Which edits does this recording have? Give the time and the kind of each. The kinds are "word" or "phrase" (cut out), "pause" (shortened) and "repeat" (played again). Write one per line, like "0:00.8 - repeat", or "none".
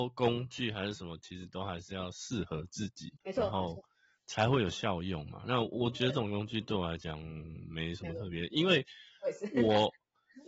0:03.2 - pause